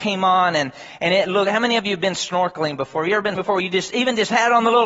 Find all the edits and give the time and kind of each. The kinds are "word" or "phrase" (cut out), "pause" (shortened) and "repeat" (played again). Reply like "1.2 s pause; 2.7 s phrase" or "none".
3.4 s word